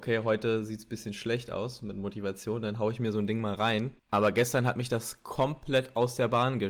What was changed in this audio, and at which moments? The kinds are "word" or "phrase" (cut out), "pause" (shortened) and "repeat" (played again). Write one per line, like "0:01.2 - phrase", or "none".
0:04.0 - pause